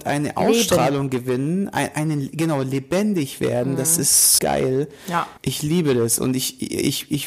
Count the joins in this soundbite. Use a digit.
2